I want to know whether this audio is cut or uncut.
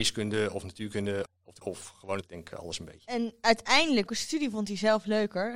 cut